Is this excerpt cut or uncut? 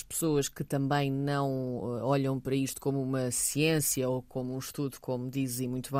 uncut